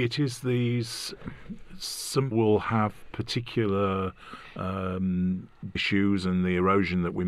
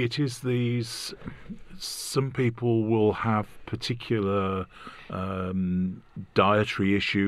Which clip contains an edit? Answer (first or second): first